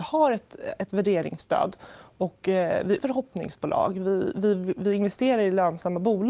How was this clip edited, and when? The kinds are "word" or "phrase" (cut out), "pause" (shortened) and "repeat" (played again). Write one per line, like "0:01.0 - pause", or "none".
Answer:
0:03.0 - word